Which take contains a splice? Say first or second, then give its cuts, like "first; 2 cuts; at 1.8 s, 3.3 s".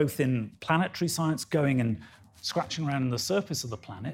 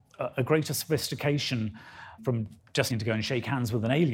second; 2 cuts; at 2.2 s, 2.9 s